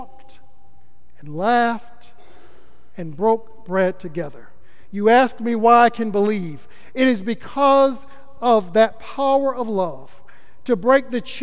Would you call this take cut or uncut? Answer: uncut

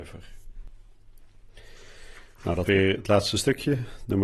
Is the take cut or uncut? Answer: cut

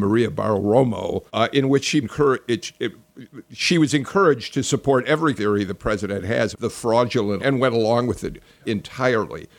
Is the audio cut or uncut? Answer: cut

